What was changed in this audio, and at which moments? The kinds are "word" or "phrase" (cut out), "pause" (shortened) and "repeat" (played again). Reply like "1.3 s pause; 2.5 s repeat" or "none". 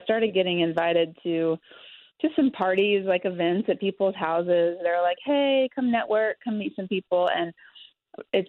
none